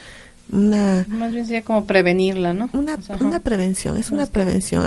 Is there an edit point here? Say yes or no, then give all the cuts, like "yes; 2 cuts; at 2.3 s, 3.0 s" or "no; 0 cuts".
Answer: no; 0 cuts